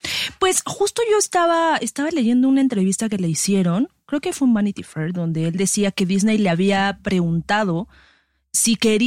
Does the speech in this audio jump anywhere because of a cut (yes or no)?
no